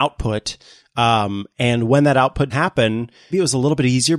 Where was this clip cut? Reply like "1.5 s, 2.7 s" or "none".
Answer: 2.5 s, 3.3 s